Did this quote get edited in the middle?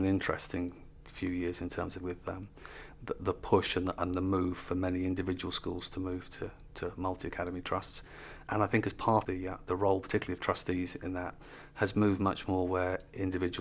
yes; 3 cuts; at 2.0 s, 8.4 s, 9.2 s

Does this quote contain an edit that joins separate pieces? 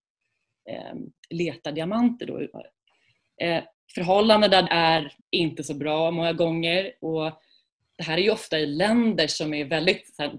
yes; 3 cuts; at 2.5 s, 4.7 s, 5.2 s

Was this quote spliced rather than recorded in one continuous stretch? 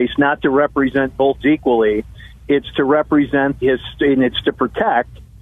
yes; 2 cuts; at 1.4 s, 3.6 s

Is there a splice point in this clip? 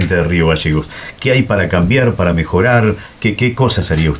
no; 0 cuts

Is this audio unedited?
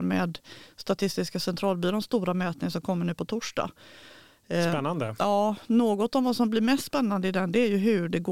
yes; 0 cuts

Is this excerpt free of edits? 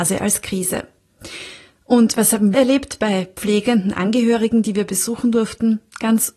no; 1 cut; at 2.5 s

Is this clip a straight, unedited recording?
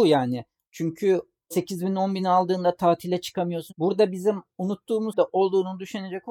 no; 1 cut; at 5.1 s

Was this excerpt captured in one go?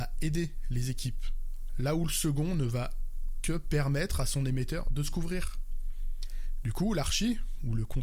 yes; 0 cuts

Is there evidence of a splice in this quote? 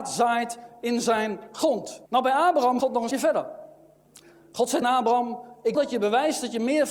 yes; 5 cuts; at 2.1 s, 2.8 s, 3.1 s, 4.8 s, 5.7 s

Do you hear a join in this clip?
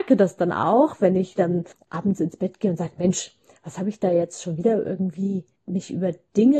no; 0 cuts

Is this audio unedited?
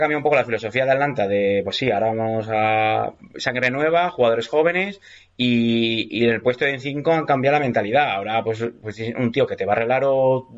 yes; 0 cuts

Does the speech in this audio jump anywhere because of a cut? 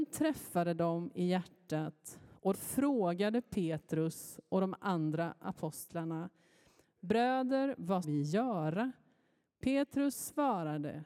yes; 2 cuts; at 2.5 s, 8.0 s

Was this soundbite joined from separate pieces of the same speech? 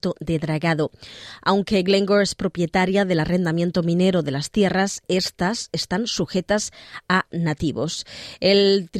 no; 0 cuts

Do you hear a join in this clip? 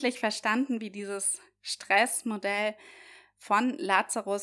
no; 0 cuts

